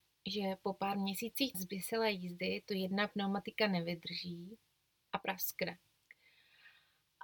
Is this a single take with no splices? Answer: no; 1 cut; at 1.5 s

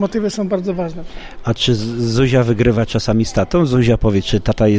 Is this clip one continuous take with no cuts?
yes; 0 cuts

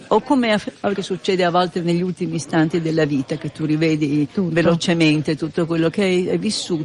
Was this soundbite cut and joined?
yes; 1 cut; at 0.9 s

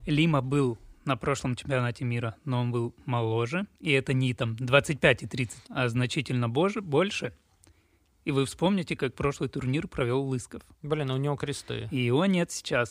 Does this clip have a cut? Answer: yes; 3 cuts; at 3.7 s, 5.6 s, 10.7 s

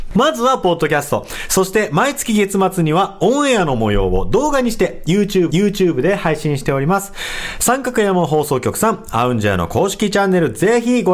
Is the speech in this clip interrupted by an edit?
yes; 1 cut; at 5.5 s

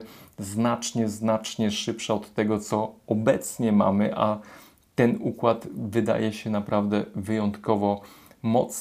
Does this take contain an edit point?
no; 0 cuts

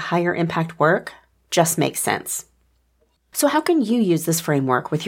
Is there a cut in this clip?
no; 0 cuts

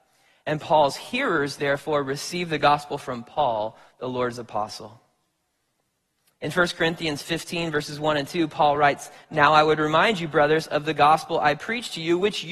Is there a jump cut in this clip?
no; 0 cuts

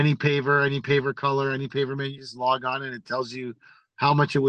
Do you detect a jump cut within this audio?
no; 0 cuts

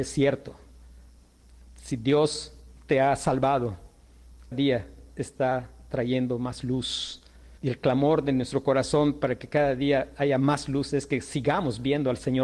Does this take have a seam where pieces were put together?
yes; 2 cuts; at 4.5 s, 7.6 s

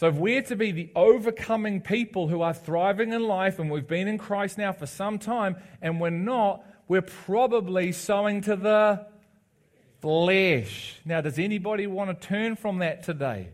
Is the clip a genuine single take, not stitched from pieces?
yes; 0 cuts

